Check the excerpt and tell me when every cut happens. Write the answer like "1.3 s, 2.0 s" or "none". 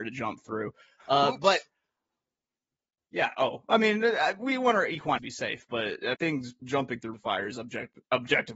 5.2 s, 6.1 s, 6.6 s, 7.1 s